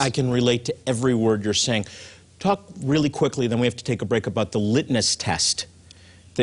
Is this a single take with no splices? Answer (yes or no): yes